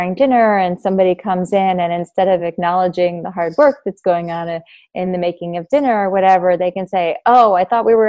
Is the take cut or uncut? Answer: uncut